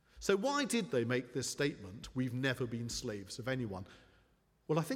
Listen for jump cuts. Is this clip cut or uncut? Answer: uncut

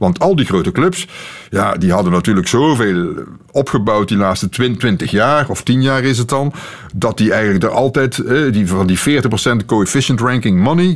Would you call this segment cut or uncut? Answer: uncut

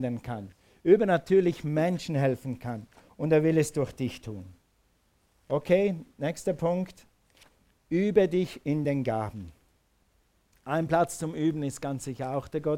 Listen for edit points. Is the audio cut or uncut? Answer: uncut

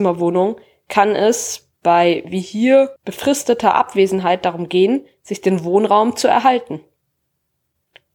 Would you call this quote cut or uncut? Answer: cut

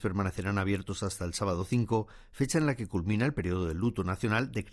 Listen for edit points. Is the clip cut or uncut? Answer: uncut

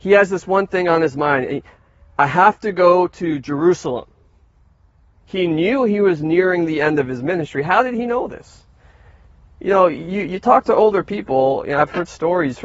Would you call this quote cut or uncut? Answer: uncut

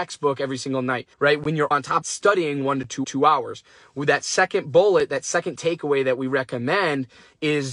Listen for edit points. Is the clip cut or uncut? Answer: cut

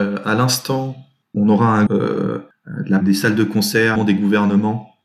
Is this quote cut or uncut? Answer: cut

